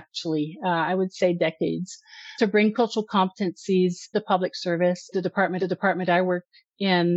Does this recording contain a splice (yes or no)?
yes